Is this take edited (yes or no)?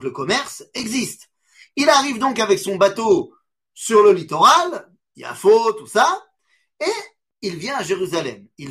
no